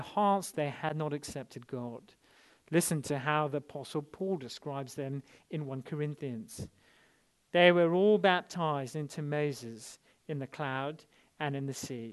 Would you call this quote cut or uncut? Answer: uncut